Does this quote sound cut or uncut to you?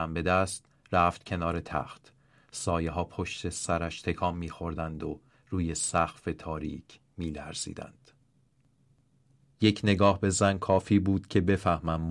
uncut